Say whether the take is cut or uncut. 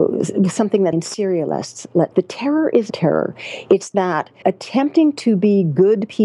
cut